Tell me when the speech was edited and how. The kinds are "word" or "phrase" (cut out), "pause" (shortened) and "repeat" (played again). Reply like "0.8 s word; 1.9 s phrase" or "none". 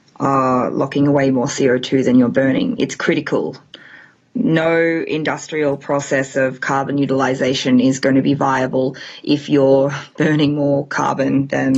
none